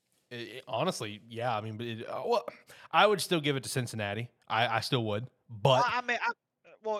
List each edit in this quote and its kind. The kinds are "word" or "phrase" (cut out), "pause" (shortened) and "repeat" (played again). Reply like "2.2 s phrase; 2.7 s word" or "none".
none